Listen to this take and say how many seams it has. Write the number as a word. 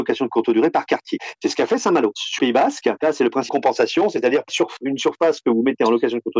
three